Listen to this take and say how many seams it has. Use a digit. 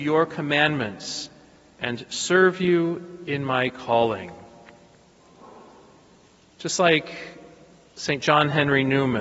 0